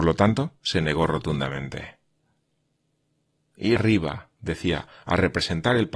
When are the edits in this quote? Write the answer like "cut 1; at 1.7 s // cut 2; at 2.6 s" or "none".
cut 1; at 3.8 s